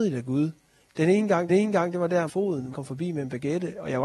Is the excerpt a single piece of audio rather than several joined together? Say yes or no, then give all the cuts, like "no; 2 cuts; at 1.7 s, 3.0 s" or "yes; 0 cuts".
no; 3 cuts; at 1.5 s, 2.3 s, 2.7 s